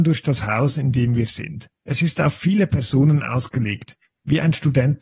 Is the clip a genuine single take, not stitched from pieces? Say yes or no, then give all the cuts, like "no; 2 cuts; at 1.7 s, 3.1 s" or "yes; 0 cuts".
no; 1 cut; at 1.7 s